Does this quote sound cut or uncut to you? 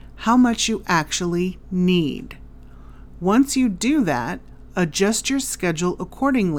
uncut